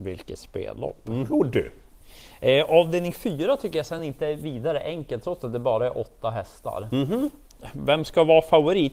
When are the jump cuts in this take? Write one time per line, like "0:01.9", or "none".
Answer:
none